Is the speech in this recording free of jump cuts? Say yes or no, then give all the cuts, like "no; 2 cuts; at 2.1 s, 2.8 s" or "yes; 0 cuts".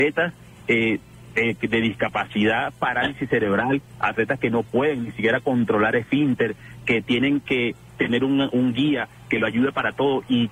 yes; 0 cuts